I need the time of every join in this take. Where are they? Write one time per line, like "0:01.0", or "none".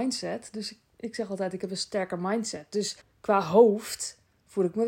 0:03.0